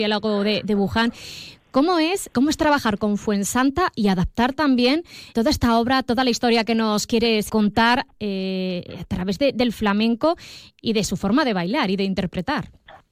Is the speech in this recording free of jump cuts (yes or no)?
no